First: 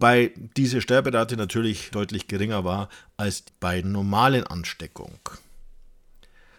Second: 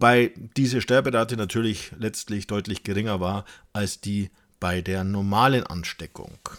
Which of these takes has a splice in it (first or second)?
first